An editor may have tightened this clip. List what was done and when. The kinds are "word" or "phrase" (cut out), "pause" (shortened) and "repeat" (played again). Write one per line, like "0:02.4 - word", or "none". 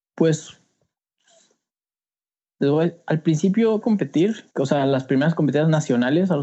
0:03.8 - phrase
0:04.5 - pause

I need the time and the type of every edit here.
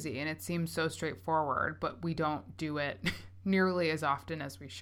none

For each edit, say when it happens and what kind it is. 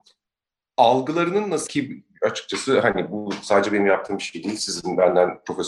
0:01.7 - phrase

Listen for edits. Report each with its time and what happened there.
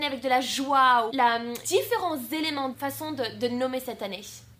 0:01.1 - word
0:01.6 - word
0:02.7 - word

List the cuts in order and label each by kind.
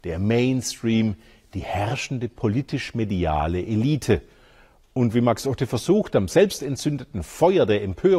none

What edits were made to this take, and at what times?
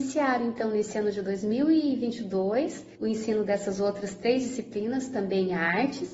0:03.0 - pause

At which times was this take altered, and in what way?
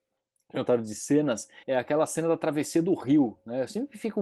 0:01.6 - pause

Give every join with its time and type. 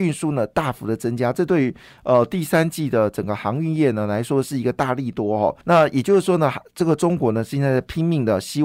0:05.6 - pause

